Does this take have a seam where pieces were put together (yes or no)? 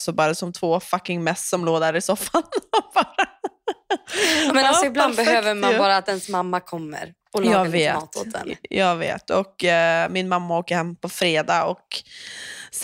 no